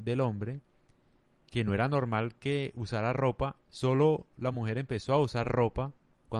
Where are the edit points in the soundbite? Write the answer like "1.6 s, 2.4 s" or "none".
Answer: none